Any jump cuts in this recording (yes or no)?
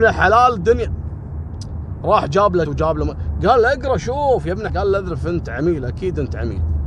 yes